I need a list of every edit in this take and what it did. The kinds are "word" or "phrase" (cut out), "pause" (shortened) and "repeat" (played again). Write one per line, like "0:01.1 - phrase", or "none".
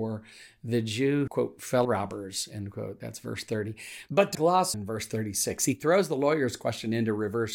0:01.3 - word
0:01.8 - word
0:04.3 - word
0:04.7 - phrase

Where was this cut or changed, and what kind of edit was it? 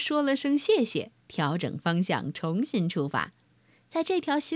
0:01.2 - pause

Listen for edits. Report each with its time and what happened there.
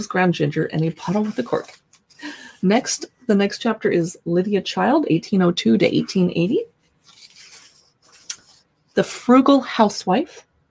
none

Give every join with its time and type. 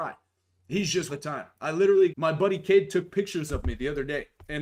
0:01.1 - phrase
0:02.1 - word

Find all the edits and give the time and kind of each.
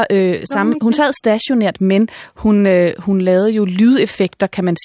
none

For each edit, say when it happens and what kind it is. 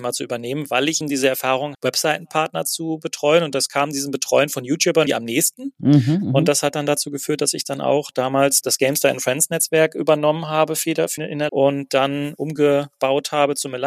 0:01.0 - word
0:01.7 - word
0:05.1 - word
0:08.6 - word
0:11.2 - word
0:11.5 - word

